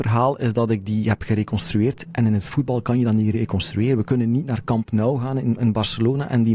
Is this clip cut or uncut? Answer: uncut